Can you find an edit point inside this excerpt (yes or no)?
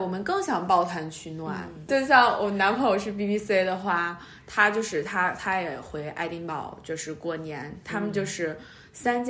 no